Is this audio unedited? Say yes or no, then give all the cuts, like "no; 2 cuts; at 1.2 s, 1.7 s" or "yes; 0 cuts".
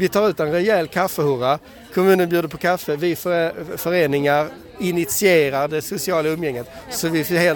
yes; 0 cuts